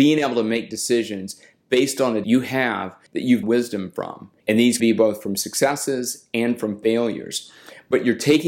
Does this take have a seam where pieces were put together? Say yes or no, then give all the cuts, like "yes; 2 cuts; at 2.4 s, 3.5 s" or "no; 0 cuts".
yes; 5 cuts; at 2.2 s, 3.1 s, 3.4 s, 4.4 s, 4.8 s